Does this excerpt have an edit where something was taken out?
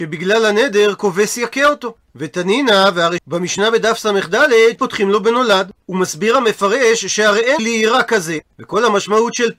yes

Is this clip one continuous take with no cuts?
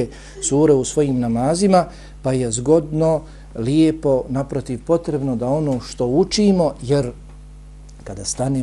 yes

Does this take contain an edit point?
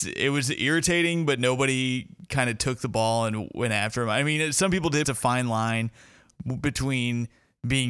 yes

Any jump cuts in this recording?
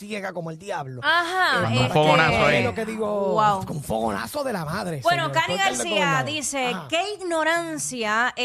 no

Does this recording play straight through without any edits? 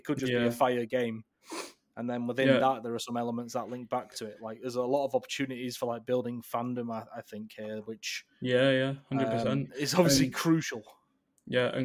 yes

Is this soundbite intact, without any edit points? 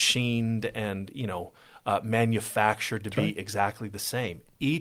yes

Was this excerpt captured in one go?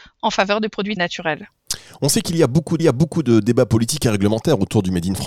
no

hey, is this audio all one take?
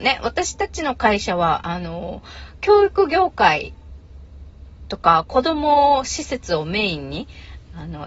yes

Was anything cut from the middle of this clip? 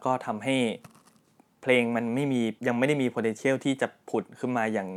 yes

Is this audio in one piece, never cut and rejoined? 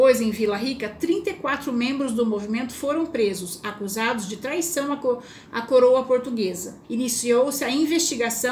no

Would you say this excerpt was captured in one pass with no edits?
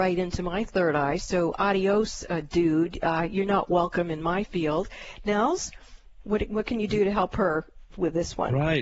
yes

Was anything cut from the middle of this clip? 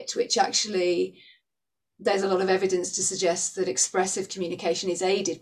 no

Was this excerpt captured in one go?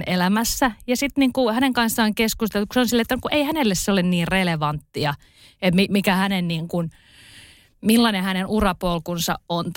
yes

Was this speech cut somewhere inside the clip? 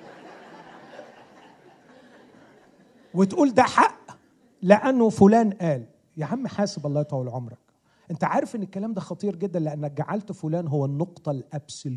no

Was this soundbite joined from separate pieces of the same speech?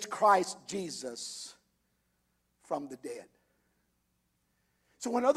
no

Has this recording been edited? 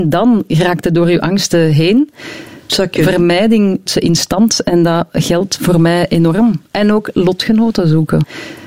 yes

